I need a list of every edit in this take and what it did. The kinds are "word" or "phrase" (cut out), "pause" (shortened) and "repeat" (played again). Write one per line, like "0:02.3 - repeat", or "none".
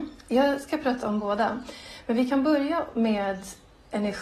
none